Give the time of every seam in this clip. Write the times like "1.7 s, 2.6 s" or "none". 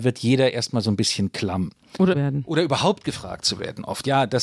2.1 s